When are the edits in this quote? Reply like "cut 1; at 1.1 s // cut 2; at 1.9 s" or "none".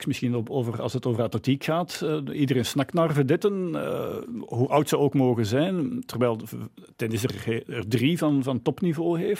none